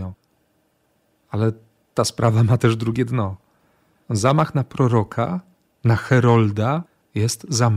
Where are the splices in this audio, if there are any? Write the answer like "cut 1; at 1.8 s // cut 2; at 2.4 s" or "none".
none